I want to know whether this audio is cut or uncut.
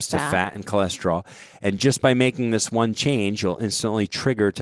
uncut